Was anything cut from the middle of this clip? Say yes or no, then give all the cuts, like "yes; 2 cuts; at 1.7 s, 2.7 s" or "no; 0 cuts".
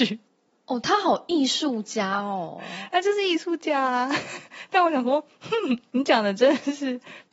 yes; 1 cut; at 5.9 s